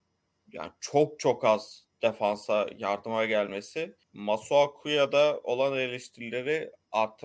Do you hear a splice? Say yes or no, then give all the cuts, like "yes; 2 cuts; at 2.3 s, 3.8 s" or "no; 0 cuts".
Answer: yes; 1 cut; at 4.0 s